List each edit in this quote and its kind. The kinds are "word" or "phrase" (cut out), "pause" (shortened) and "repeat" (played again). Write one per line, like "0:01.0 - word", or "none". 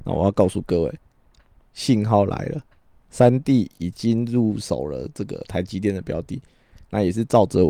none